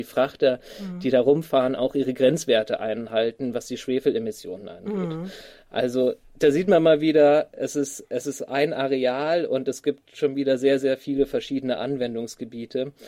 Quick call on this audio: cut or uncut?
cut